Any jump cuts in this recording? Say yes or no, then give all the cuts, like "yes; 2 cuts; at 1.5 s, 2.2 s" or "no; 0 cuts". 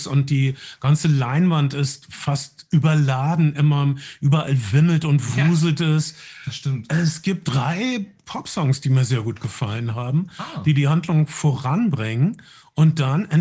no; 0 cuts